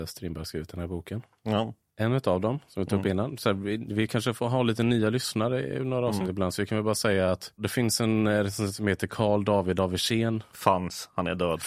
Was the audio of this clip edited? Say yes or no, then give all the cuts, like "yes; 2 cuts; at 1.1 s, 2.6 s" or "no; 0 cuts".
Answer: no; 0 cuts